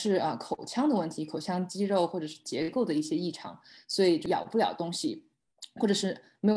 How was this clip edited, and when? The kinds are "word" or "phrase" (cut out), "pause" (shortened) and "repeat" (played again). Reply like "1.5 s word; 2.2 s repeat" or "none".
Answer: none

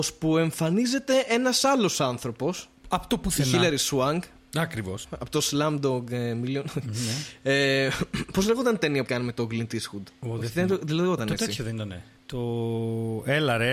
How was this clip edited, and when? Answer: 9.1 s word

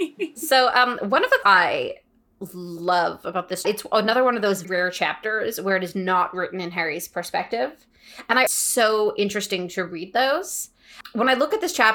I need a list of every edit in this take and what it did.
1.4 s word; 3.6 s phrase; 4.6 s word; 8.5 s phrase

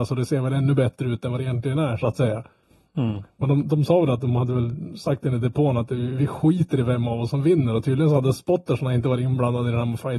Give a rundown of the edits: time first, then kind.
none

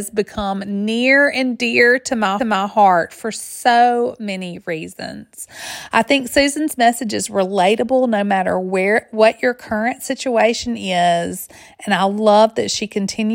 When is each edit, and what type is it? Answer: 2.4 s repeat

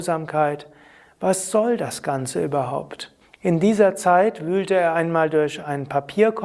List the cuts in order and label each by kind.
3.2 s pause

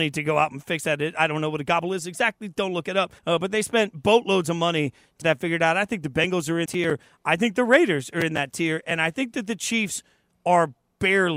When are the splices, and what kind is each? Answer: 3.2 s pause; 5.2 s word; 6.7 s word

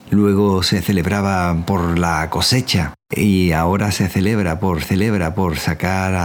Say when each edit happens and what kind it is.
4.8 s repeat

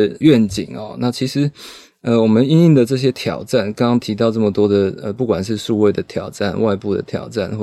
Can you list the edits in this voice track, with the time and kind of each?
none

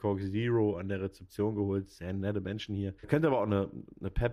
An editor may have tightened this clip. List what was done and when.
3.0 s pause

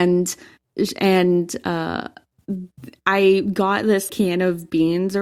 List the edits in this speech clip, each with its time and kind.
4.1 s word

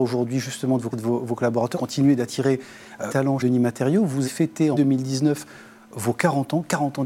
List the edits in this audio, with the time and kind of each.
0.9 s word; 1.7 s word; 3.1 s word; 3.4 s word; 4.2 s word; 4.7 s word

